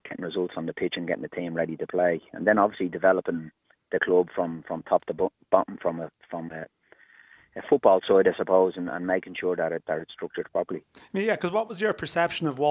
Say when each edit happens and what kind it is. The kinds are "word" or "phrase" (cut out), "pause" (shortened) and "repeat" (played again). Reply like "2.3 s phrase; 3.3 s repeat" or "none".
none